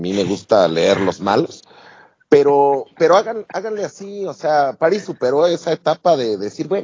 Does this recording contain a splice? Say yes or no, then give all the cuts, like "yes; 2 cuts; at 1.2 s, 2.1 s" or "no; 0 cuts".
no; 0 cuts